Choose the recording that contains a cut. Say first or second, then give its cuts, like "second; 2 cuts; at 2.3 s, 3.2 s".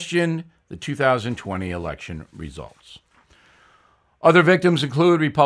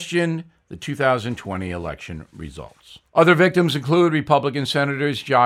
second; 1 cut; at 3.1 s